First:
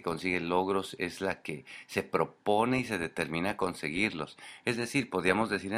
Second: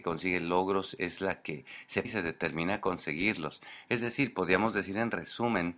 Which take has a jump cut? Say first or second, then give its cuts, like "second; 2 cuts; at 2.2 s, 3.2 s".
second; 1 cut; at 2.0 s